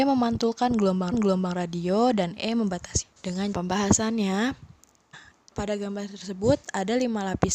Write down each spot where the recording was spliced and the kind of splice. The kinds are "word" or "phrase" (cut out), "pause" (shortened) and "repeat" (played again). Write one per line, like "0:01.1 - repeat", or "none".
0:01.1 - repeat
0:03.0 - word
0:03.5 - phrase
0:05.5 - word